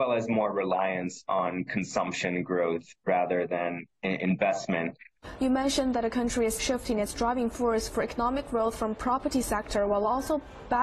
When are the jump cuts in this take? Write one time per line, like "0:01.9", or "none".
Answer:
0:06.6